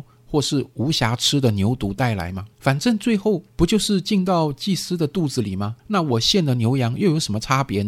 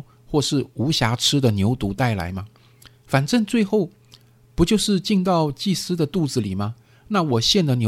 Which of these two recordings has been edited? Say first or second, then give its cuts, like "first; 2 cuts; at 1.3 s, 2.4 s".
first; 3 cuts; at 2.5 s, 3.5 s, 5.8 s